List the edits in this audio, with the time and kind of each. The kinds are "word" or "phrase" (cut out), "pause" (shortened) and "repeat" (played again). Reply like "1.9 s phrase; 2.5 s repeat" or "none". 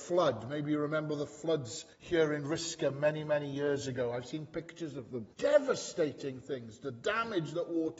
1.9 s pause; 5.3 s pause